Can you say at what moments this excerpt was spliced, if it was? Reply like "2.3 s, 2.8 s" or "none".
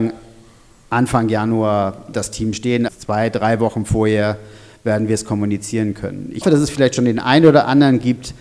2.1 s, 2.9 s, 6.4 s